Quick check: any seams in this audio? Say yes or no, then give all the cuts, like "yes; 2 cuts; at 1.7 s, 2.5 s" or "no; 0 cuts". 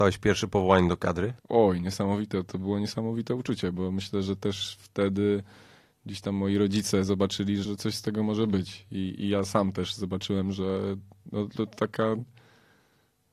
yes; 2 cuts; at 1.4 s, 7.6 s